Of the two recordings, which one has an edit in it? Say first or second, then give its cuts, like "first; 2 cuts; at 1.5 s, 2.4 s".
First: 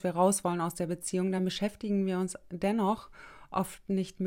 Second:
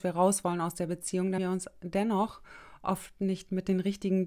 second; 1 cut; at 1.4 s